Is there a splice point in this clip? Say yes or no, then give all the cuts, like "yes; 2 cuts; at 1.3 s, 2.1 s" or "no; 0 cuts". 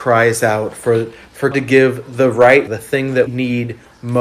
yes; 3 cuts; at 1.5 s, 2.7 s, 3.3 s